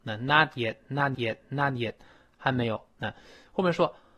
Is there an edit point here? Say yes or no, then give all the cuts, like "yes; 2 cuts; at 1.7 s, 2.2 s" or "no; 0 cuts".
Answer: yes; 1 cut; at 1.1 s